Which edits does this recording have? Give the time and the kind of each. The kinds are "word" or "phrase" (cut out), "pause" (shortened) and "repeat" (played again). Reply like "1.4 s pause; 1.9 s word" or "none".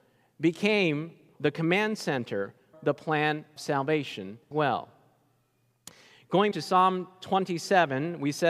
1.4 s word; 2.7 s word; 3.6 s word; 4.5 s word; 6.5 s word

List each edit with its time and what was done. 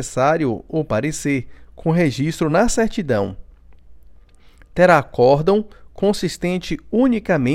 none

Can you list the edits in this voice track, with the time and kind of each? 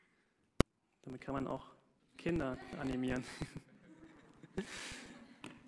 2.0 s pause

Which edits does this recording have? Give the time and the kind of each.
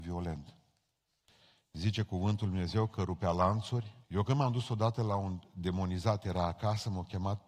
4.0 s pause

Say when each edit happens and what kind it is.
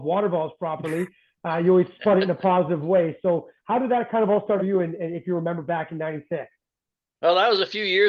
4.6 s word

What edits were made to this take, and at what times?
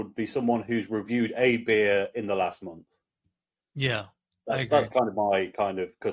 none

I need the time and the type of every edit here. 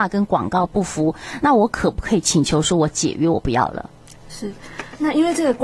none

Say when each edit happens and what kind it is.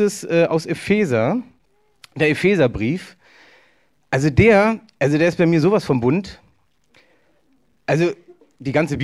none

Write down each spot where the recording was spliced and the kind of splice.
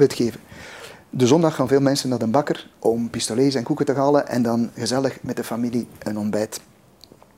2.7 s pause

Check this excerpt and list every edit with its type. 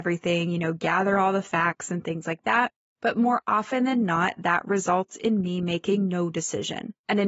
none

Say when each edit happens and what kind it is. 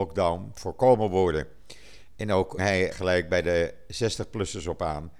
2.6 s word; 2.9 s word

